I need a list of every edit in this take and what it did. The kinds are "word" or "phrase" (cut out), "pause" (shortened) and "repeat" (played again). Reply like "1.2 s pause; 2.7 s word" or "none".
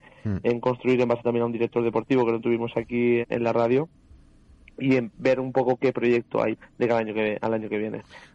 3.2 s word; 6.6 s word

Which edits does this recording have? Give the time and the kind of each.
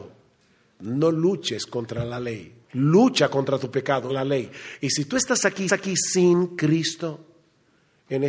2.6 s pause; 4.1 s phrase; 5.7 s repeat

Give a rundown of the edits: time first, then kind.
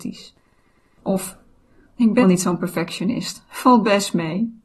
2.2 s word

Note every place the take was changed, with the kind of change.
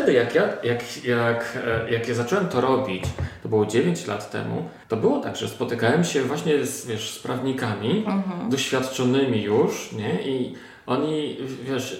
4.8 s pause

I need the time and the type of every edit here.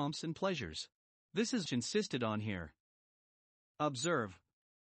1.0 s pause; 1.7 s word

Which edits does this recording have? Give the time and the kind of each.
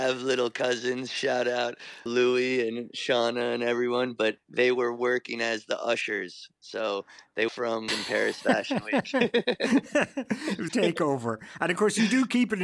2.1 s word; 4.4 s word; 7.5 s word; 7.9 s phrase; 10.7 s word

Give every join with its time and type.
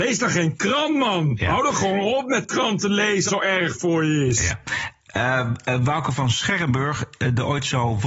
3.3 s phrase

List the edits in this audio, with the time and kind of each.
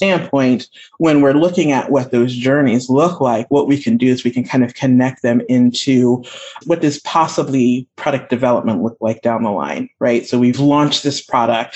none

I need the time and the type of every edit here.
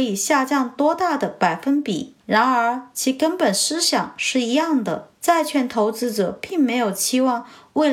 2.2 s pause; 5.2 s pause

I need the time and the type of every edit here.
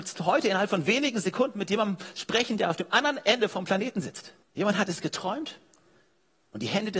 4.4 s pause

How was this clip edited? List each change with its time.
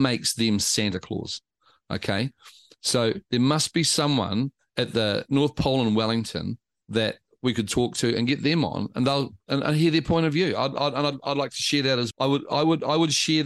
12.1 s word

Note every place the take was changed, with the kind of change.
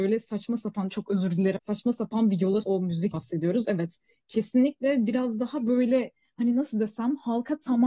1.6 s word; 2.6 s word; 3.1 s word

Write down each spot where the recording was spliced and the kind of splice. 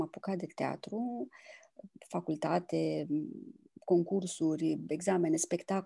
none

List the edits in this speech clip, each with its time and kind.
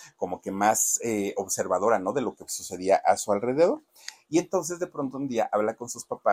none

